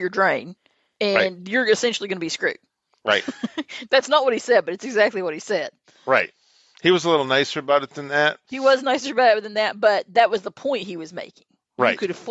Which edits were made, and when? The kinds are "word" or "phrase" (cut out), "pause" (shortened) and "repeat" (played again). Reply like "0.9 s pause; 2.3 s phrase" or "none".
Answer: none